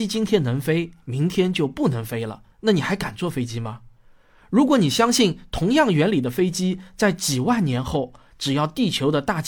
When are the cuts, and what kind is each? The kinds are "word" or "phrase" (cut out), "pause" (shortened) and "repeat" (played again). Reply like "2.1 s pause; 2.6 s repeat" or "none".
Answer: 2.5 s pause